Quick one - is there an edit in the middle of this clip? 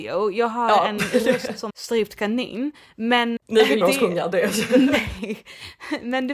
yes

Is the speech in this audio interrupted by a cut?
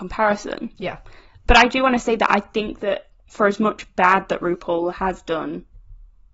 no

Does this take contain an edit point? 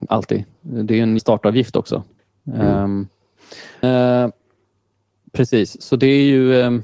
yes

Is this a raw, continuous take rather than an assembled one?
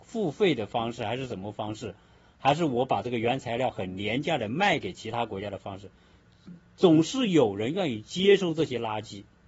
yes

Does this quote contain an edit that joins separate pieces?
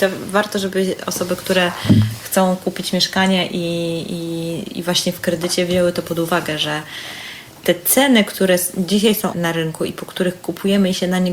yes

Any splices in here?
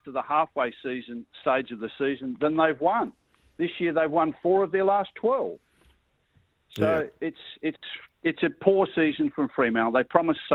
no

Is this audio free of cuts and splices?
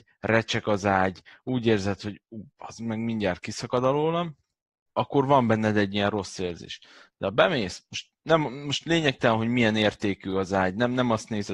no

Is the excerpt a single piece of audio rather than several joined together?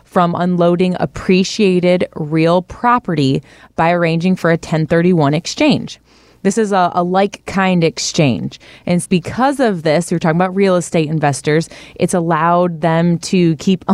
no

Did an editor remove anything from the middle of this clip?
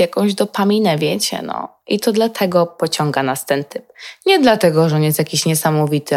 no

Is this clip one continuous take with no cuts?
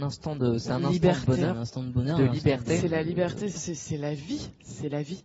no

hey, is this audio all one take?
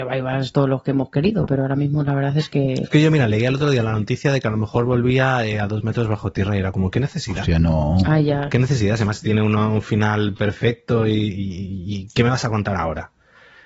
yes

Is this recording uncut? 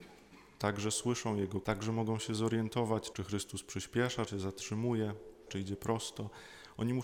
no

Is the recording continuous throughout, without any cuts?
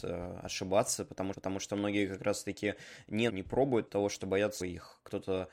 no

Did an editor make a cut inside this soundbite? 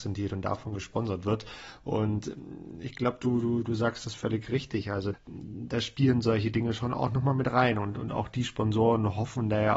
yes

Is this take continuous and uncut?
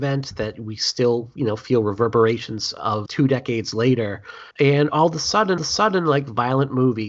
no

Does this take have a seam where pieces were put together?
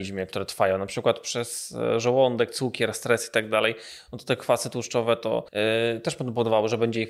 yes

